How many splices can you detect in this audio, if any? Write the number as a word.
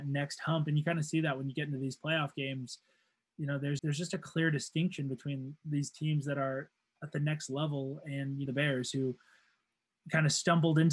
two